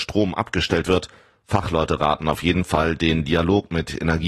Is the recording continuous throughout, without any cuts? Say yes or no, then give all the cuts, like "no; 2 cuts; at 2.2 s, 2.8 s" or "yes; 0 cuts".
yes; 0 cuts